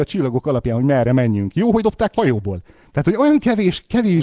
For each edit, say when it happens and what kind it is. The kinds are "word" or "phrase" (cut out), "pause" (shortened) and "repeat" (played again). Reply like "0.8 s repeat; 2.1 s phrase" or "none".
1.8 s word; 2.2 s word